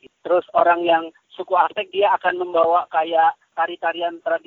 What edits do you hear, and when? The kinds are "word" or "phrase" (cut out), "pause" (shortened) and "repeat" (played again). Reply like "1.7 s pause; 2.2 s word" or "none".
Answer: none